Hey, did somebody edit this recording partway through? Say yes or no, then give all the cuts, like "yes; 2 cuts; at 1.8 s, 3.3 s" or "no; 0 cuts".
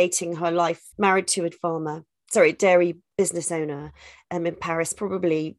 yes; 2 cuts; at 0.9 s, 1.5 s